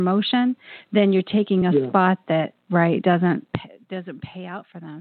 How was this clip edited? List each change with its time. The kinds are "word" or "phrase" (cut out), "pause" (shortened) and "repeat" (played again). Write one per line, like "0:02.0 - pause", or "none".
none